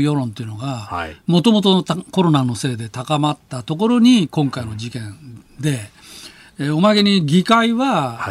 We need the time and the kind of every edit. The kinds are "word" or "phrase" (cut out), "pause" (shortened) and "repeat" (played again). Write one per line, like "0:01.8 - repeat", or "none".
none